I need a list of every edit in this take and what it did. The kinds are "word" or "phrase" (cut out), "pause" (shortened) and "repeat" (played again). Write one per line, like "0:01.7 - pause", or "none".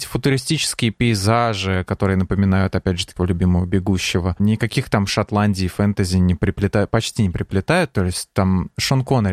0:03.2 - word